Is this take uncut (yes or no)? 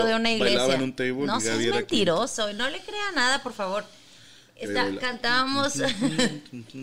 yes